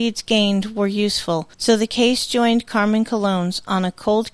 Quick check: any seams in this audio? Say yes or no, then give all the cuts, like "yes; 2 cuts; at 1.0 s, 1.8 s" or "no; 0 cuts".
yes; 1 cut; at 1.5 s